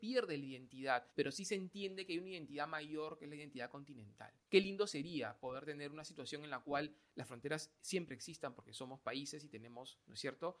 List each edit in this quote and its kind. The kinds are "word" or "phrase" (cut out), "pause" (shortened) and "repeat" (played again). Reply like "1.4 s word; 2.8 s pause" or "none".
1.1 s pause; 4.4 s pause